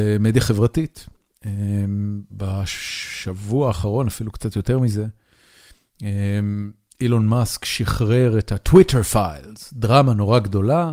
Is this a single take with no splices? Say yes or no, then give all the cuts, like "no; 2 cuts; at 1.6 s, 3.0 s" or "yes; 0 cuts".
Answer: yes; 0 cuts